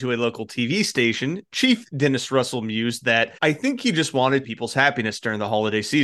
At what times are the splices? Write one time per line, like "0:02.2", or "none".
0:03.4
0:04.4